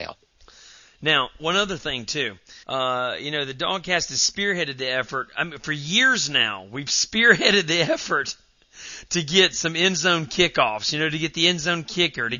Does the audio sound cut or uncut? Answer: cut